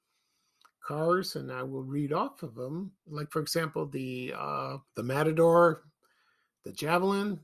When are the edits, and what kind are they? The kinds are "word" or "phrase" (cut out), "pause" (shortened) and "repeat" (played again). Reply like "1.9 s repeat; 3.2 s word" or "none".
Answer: 3.0 s pause; 4.9 s pause